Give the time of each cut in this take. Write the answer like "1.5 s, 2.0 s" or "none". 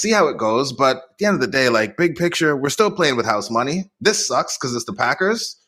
none